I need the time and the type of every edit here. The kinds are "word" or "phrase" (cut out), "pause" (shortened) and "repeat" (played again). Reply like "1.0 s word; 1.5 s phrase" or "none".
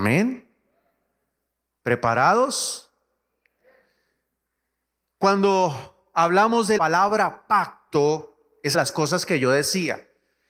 6.8 s word; 8.7 s phrase